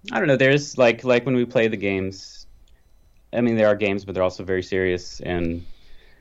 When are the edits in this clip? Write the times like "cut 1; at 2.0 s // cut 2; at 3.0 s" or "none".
none